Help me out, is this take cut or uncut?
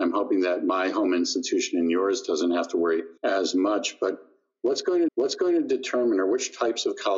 cut